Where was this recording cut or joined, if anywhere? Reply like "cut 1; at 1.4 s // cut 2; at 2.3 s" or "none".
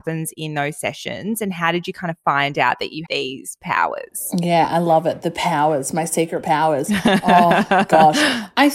cut 1; at 3.1 s